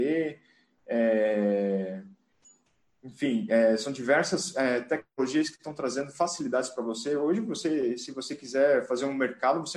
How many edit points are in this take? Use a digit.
0